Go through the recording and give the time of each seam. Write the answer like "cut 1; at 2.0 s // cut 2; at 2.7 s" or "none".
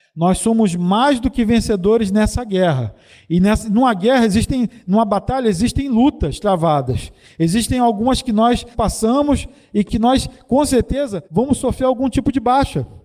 cut 1; at 8.7 s // cut 2; at 11.2 s